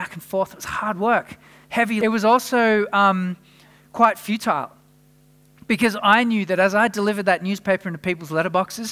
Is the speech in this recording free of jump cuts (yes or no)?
no